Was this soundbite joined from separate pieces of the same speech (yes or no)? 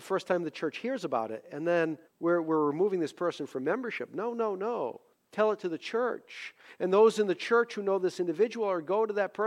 yes